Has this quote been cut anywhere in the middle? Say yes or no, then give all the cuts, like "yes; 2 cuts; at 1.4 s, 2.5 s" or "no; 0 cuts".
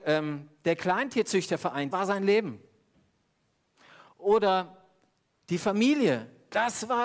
yes; 1 cut; at 1.9 s